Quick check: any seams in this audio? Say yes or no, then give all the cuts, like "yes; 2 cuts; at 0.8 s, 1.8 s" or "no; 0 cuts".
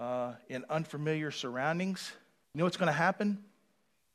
yes; 1 cut; at 2.4 s